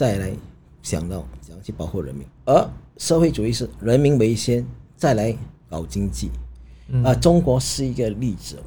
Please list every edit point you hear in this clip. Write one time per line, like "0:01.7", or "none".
0:02.3
0:04.9
0:05.6